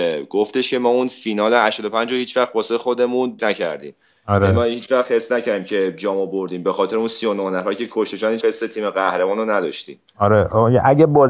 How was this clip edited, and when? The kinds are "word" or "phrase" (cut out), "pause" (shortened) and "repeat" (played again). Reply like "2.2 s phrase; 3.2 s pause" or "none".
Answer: 3.4 s phrase; 8.4 s word; 10.1 s pause